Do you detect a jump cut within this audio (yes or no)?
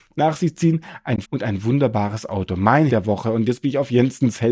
yes